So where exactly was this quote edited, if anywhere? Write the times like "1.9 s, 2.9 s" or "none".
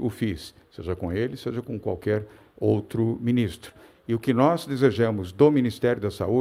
none